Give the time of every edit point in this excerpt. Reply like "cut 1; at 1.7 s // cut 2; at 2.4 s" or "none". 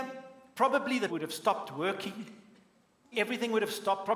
cut 1; at 1.1 s // cut 2; at 3.1 s